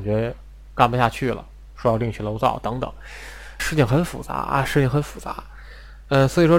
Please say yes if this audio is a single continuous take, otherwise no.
no